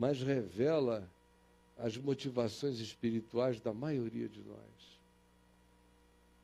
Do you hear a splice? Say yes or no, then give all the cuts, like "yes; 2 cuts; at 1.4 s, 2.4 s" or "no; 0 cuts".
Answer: no; 0 cuts